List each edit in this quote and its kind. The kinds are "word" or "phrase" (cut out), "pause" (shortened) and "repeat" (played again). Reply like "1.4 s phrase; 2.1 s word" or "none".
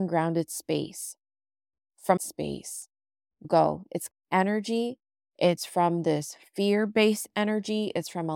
2.2 s phrase; 3.4 s phrase; 4.1 s phrase

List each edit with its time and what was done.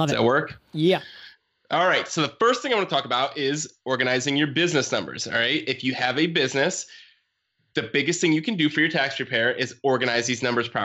none

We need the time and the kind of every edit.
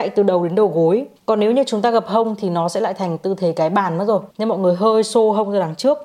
1.2 s pause; 4.3 s pause

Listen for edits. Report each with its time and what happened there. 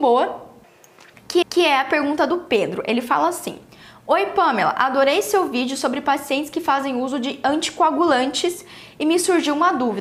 1.4 s repeat

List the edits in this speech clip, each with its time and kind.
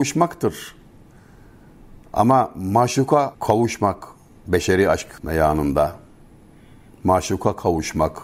none

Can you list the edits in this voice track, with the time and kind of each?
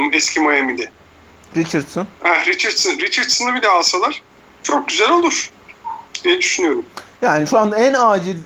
2.1 s pause; 4.3 s pause

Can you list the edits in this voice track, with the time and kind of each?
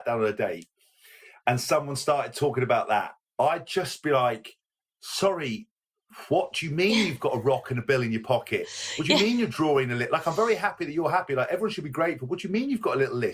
none

